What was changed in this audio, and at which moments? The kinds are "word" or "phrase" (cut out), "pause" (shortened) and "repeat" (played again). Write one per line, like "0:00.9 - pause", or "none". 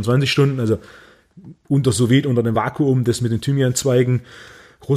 none